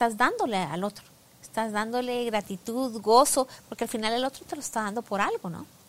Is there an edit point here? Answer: no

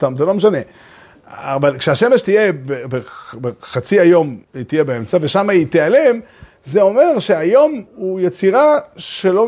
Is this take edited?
yes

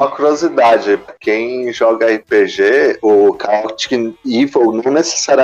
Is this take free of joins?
no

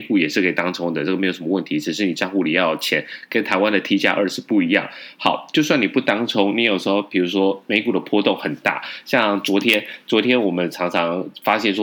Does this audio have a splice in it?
no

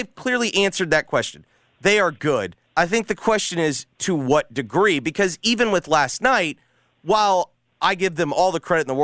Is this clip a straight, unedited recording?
no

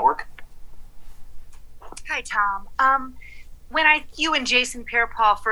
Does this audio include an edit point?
yes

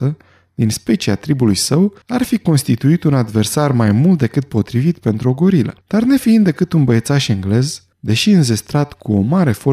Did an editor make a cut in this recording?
yes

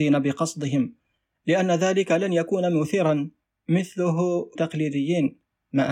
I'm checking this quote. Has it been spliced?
yes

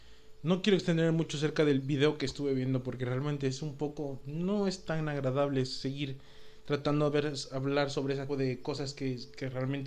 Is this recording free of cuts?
no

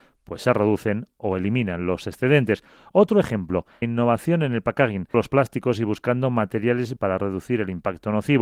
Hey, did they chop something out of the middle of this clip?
yes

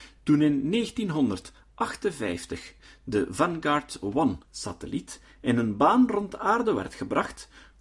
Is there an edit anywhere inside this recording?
yes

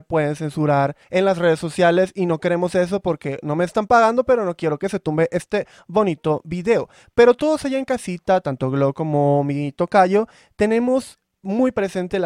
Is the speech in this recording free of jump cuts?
no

